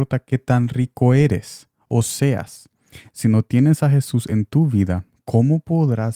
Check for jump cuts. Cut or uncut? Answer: uncut